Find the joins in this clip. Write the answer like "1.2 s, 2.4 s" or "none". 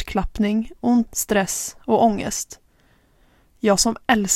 1.1 s